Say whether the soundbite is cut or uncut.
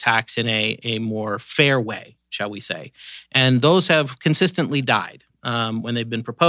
cut